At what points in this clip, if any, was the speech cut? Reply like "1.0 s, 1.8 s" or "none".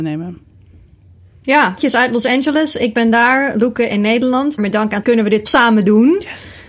1.8 s, 3.9 s, 4.6 s, 5.0 s, 5.5 s